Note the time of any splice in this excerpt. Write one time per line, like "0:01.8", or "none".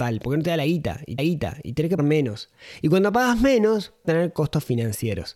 0:01.2
0:02.0
0:04.0